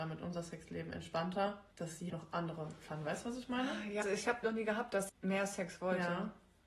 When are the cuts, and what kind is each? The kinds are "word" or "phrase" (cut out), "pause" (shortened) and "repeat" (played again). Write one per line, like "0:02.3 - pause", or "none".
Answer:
0:01.7 - pause
0:02.1 - word
0:02.9 - word
0:04.0 - word
0:04.4 - word
0:05.1 - word